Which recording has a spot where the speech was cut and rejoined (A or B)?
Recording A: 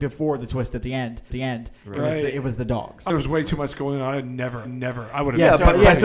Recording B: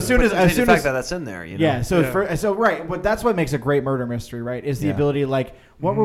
A